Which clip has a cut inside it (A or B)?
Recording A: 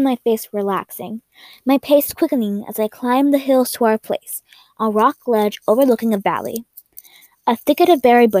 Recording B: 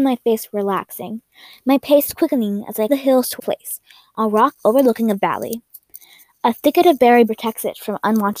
B